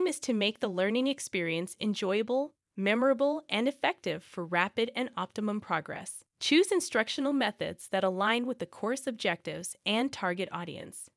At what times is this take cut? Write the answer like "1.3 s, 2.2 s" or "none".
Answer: 6.3 s